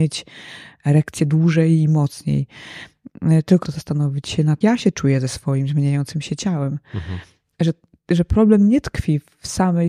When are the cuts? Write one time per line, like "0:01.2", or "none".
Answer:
0:03.6
0:04.6